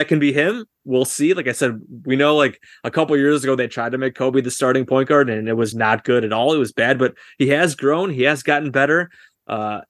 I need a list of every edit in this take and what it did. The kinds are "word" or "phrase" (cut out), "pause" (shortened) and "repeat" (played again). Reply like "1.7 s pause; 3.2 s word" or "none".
5.7 s word